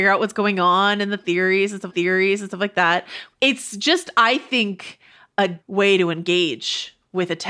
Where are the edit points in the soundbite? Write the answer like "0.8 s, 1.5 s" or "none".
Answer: 1.9 s, 5.6 s